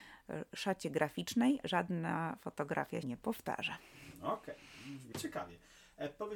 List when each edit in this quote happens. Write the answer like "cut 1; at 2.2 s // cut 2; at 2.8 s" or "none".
cut 1; at 1.6 s // cut 2; at 3.0 s // cut 3; at 5.1 s

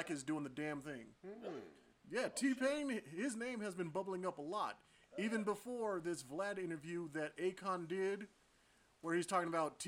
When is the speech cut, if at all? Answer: cut 1; at 1.2 s

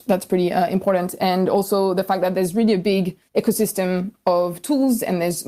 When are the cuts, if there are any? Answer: cut 1; at 3.3 s

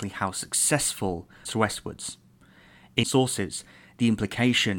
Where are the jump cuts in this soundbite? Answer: cut 1; at 1.4 s // cut 2; at 3.0 s

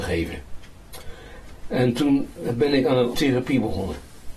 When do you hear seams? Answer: cut 1; at 3.1 s

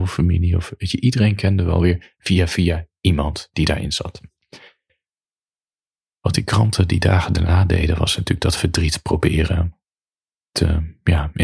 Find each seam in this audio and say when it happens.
none

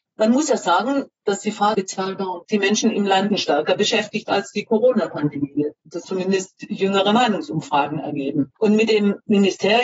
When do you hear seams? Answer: cut 1; at 1.7 s // cut 2; at 2.4 s // cut 3; at 3.3 s // cut 4; at 6.0 s // cut 5; at 8.6 s

